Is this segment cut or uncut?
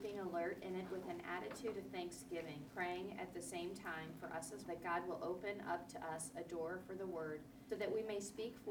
cut